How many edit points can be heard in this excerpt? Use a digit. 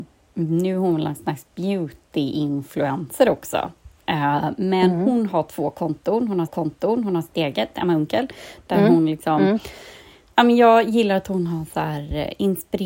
1